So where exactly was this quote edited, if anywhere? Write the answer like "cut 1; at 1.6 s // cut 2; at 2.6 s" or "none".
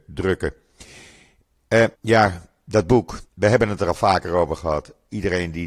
cut 1; at 1.9 s // cut 2; at 3.3 s